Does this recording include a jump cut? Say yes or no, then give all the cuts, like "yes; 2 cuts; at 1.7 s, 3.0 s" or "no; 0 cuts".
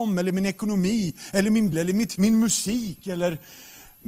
yes; 2 cuts; at 1.7 s, 2.2 s